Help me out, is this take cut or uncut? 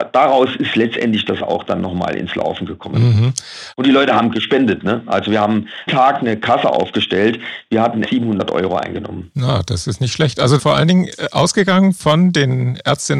cut